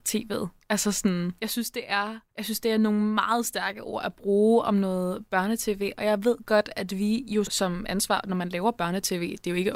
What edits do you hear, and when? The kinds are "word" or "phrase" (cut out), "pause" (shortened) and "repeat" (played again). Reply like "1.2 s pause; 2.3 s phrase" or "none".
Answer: 1.4 s pause; 2.3 s pause; 7.4 s word